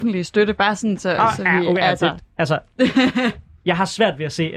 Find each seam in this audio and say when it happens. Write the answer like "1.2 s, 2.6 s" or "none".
none

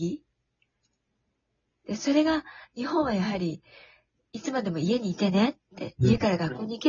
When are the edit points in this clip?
none

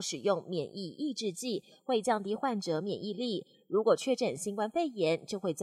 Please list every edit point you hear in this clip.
none

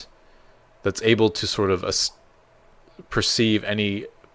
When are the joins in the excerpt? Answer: none

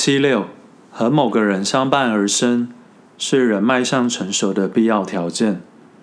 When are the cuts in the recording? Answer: none

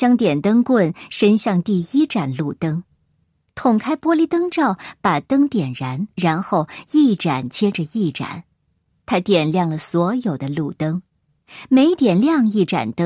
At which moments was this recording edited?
6.1 s

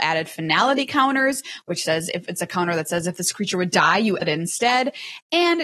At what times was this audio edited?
4.2 s

